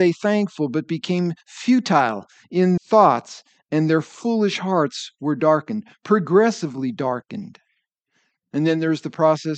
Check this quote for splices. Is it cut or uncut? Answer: cut